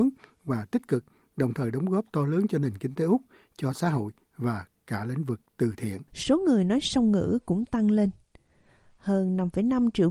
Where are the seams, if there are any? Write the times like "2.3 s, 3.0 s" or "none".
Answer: 6.1 s